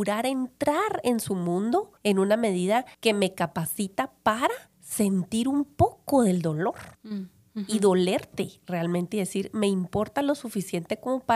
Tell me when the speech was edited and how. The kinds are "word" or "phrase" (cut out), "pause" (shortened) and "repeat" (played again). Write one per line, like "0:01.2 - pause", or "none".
0:02.0 - pause
0:02.9 - pause
0:04.7 - pause
0:06.9 - pause

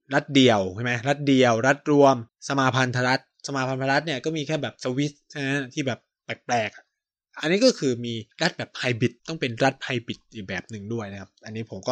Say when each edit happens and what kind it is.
0:02.3 - pause
0:08.3 - pause
0:09.2 - pause

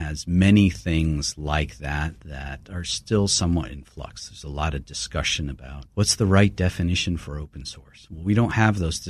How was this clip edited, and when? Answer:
0:05.9 - pause

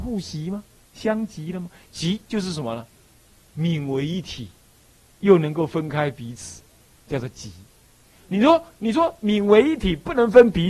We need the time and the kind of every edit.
0:05.0 - pause

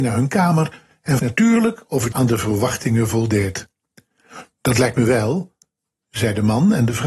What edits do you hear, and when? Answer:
0:01.2 - word
0:02.1 - word

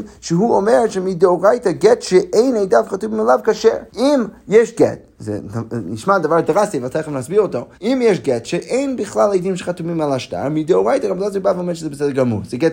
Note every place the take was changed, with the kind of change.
0:03.9 - pause
0:07.7 - pause

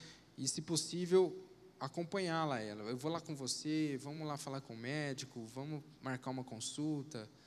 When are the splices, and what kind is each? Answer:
none

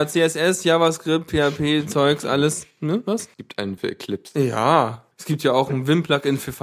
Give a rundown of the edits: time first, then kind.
0:03.3 - pause
0:03.8 - word
0:05.1 - pause

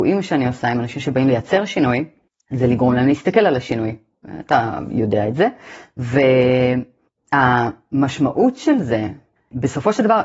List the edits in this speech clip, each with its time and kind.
none

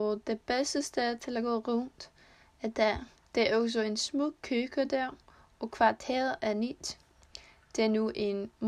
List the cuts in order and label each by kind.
0:03.2 - pause

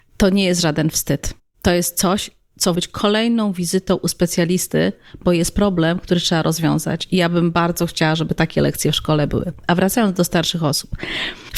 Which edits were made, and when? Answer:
0:01.4 - pause
0:02.7 - phrase

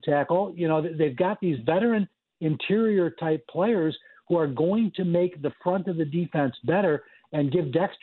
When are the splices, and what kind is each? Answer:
none

